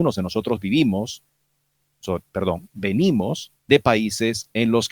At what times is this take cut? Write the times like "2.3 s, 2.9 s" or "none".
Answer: 3.6 s